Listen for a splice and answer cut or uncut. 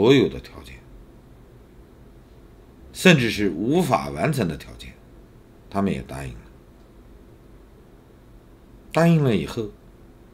cut